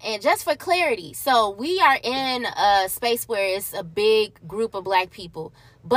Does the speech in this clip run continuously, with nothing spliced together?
yes; 0 cuts

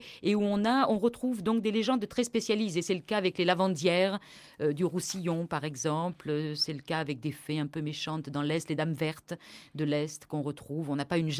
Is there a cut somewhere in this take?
no; 0 cuts

